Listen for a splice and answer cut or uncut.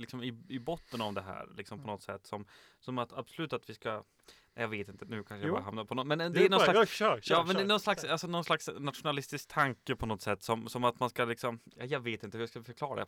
uncut